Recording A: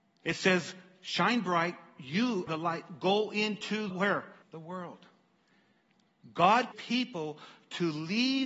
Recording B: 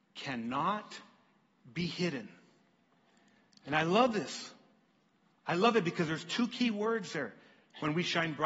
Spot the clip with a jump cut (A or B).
A